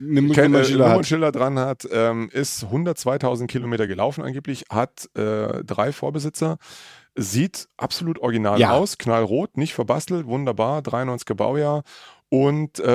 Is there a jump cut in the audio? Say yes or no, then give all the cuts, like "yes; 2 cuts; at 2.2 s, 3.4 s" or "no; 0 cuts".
no; 0 cuts